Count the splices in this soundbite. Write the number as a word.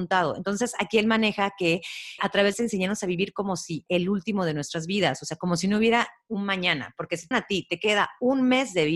four